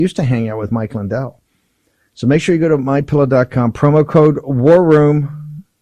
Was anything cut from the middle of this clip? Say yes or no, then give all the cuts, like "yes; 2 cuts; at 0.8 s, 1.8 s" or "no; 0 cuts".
no; 0 cuts